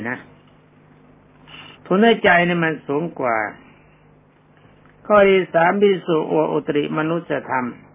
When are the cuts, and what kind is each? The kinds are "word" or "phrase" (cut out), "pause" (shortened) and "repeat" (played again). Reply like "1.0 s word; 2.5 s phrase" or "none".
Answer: 1.7 s pause